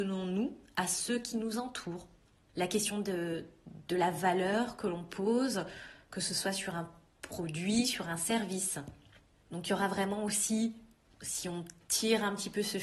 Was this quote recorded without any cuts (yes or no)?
yes